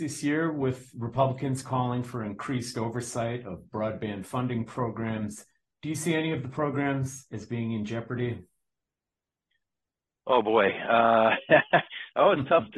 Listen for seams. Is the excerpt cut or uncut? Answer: uncut